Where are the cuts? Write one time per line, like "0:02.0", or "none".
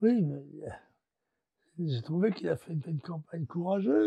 0:02.8